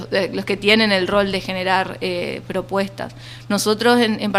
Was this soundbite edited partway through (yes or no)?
no